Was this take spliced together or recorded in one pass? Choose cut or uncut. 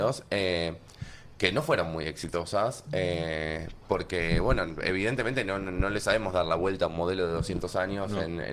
uncut